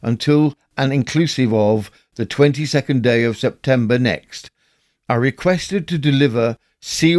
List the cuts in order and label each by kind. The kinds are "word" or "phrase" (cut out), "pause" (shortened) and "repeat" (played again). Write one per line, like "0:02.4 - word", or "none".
none